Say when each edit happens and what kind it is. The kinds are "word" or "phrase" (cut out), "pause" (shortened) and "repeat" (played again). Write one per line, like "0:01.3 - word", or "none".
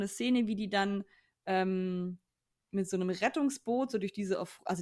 none